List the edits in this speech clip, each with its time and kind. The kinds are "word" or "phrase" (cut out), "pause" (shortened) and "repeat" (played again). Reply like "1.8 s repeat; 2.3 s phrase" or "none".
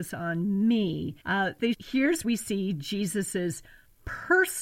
1.2 s pause; 1.7 s word; 2.2 s word